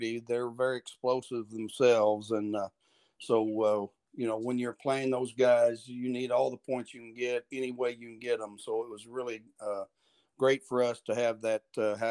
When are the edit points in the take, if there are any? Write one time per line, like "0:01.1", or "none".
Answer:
none

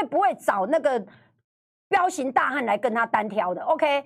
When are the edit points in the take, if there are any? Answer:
none

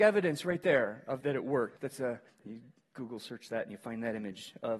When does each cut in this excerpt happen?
0:01.2
0:01.8
0:02.3

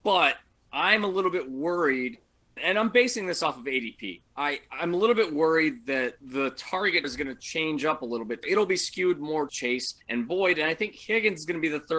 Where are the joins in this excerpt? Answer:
0:02.6
0:04.3
0:06.2
0:07.0
0:08.4
0:09.5
0:10.0

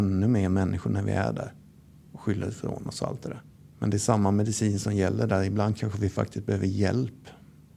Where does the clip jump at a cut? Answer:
0:03.5

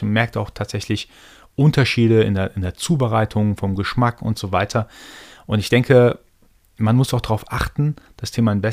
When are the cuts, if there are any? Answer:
none

